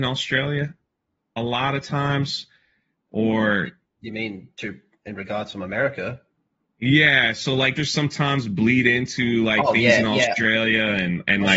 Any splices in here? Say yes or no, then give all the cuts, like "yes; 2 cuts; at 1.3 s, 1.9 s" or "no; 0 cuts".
yes; 1 cut; at 7.8 s